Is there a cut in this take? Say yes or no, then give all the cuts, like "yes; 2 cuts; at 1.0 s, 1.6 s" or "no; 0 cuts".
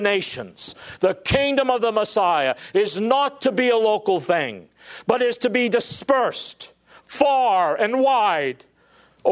no; 0 cuts